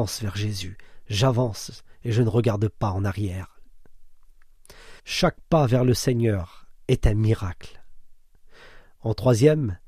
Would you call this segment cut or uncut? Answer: cut